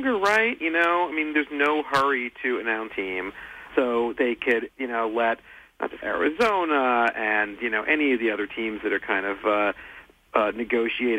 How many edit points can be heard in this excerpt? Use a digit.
4